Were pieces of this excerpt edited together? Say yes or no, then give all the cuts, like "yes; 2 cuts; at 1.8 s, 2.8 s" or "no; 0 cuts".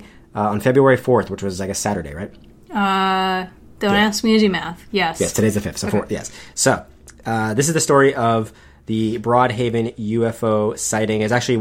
no; 0 cuts